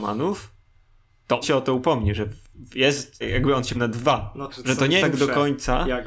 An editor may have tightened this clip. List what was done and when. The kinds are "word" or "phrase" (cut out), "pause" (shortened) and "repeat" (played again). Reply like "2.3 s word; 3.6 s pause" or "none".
1.4 s word; 3.2 s word; 3.7 s word; 4.5 s word; 5.0 s word